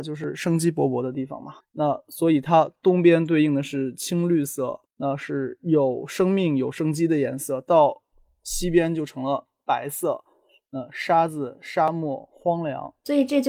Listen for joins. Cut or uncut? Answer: cut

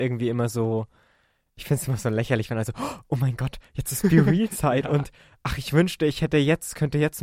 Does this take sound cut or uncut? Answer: uncut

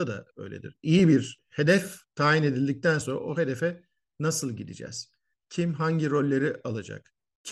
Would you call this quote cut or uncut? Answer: uncut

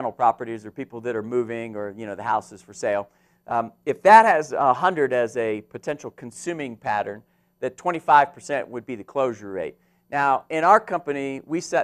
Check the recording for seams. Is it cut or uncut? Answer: uncut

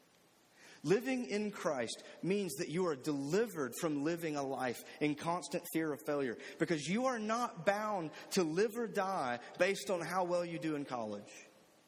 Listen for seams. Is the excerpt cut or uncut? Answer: uncut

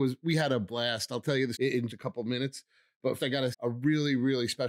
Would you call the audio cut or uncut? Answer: cut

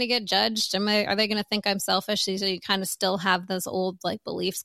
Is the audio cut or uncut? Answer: uncut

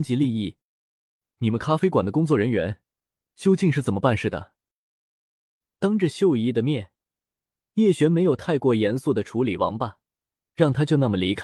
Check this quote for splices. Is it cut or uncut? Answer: uncut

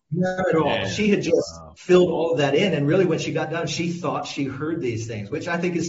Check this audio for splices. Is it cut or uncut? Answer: uncut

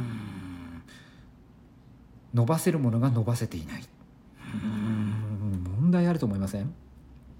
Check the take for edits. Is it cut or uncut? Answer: cut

